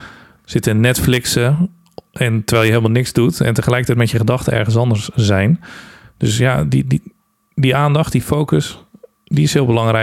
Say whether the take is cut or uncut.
uncut